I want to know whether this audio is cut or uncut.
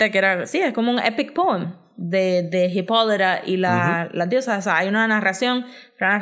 uncut